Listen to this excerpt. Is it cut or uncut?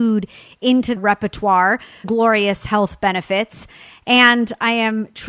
cut